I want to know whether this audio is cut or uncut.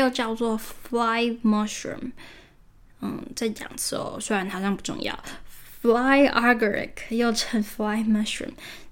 uncut